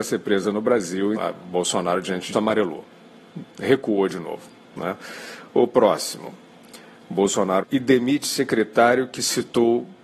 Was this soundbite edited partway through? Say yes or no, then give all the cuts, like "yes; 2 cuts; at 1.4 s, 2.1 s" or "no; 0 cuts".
yes; 3 cuts; at 1.2 s, 2.3 s, 7.6 s